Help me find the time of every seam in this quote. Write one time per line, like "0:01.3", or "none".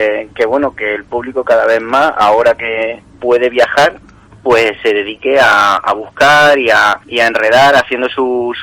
0:04.3
0:07.0